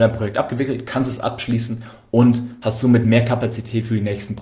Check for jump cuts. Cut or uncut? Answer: uncut